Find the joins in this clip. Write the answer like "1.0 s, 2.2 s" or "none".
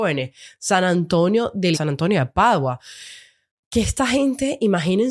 1.7 s